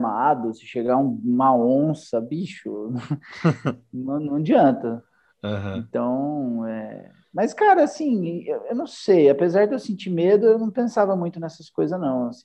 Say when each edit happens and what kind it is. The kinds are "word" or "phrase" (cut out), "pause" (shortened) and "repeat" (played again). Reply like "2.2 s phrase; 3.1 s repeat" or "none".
none